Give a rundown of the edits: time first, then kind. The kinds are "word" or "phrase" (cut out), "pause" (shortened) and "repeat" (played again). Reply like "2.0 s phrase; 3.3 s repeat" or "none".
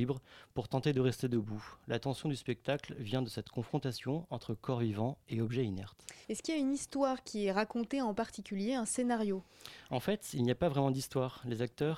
6.2 s pause

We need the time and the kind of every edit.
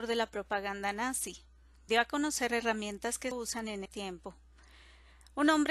1.9 s word; 3.3 s word; 3.9 s word

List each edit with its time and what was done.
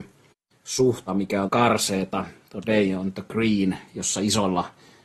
1.1 s phrase; 1.5 s phrase

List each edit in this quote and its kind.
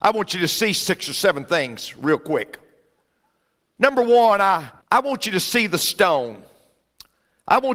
4.8 s pause

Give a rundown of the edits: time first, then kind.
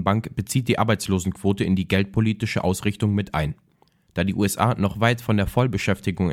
none

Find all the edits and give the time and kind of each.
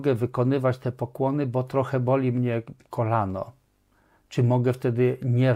none

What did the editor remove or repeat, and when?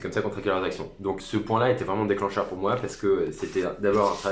1.2 s word

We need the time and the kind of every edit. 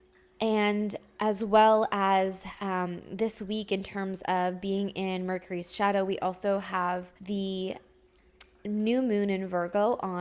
7.2 s pause

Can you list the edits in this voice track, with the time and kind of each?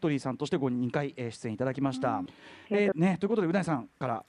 2.3 s phrase; 2.9 s word

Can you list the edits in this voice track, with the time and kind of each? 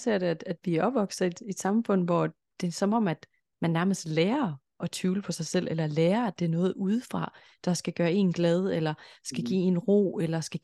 none

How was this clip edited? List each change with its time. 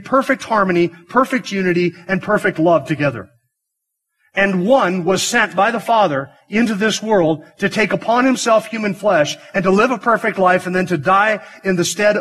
none

